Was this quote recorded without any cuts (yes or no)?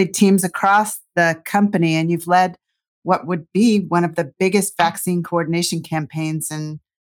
yes